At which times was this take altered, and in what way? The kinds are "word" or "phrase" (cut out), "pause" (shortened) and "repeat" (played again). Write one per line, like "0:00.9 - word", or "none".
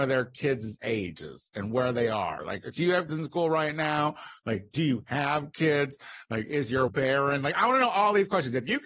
0:03.1 - word
0:06.9 - word